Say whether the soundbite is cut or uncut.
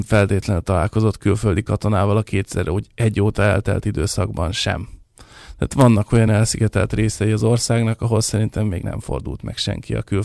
uncut